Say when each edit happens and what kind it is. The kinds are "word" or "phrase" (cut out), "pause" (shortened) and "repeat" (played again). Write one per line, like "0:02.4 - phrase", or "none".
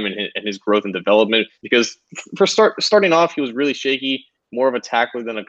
0:01.6 - pause